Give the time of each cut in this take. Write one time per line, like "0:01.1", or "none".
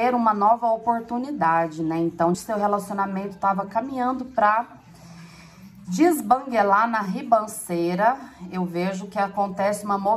0:02.3

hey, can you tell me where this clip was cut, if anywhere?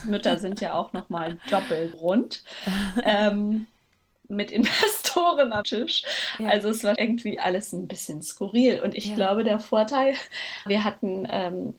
0:01.9
0:05.6
0:07.0
0:10.7

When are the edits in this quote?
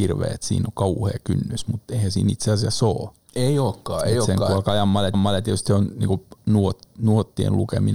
0:05.1

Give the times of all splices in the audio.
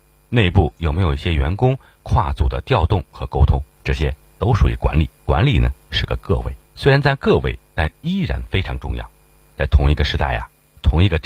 0:03.7
0:05.2
0:06.6

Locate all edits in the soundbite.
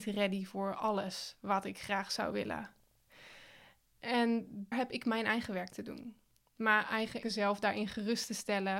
0:04.7
0:07.2

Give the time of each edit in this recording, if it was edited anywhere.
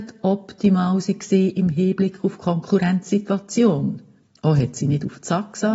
0:04.2

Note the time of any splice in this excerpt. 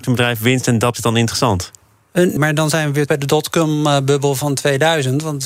0:00.9
0:02.4
0:03.1

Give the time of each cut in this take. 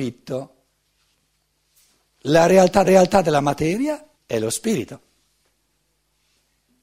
0:02.8
0:04.1

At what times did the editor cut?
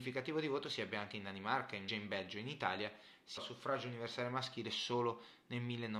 0:01.9
0:03.4

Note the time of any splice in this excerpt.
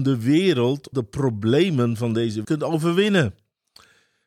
0:00.9
0:02.4

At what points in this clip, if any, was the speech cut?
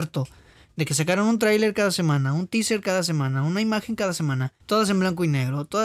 0:04.6

